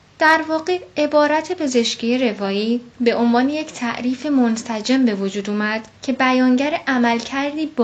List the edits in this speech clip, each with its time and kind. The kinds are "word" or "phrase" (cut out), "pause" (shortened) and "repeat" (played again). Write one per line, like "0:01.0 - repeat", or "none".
0:02.9 - pause
0:06.0 - pause